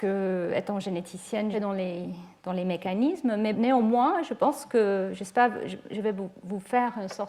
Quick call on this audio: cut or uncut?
cut